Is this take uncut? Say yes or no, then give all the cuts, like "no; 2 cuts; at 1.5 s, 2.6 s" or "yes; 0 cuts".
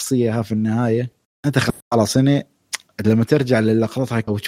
yes; 0 cuts